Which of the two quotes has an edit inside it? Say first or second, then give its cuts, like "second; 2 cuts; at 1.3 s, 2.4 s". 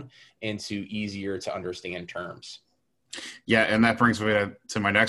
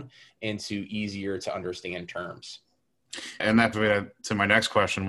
second; 2 cuts; at 3.4 s, 3.7 s